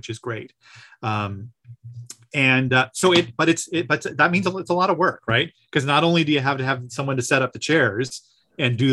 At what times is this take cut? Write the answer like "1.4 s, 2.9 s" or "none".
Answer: none